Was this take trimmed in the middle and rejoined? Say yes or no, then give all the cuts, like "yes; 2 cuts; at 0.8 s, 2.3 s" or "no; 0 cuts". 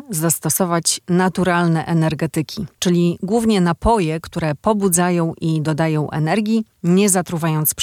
no; 0 cuts